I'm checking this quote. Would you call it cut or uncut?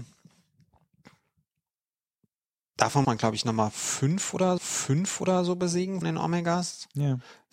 cut